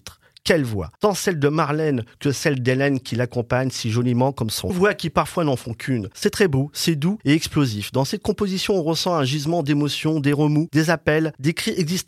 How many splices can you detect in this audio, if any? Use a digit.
1